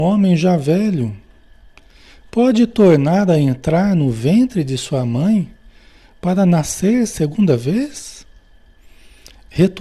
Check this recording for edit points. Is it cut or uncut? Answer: uncut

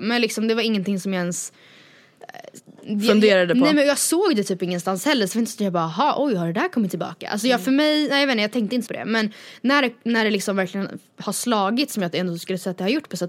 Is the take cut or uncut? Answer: cut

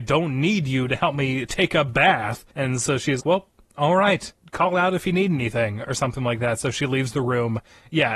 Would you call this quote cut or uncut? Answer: cut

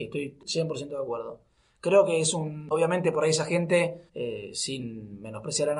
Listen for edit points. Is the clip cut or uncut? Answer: cut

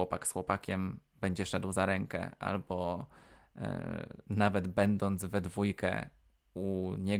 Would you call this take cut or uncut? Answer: uncut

